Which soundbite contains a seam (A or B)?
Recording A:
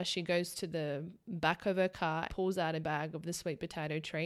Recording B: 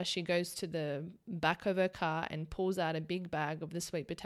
A